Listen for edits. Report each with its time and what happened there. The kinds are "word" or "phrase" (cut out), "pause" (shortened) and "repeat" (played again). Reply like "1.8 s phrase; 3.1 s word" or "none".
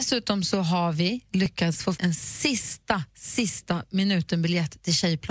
2.0 s word